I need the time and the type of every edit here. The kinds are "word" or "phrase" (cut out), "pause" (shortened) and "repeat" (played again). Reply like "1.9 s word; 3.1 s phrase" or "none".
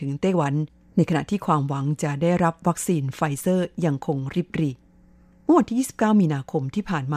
none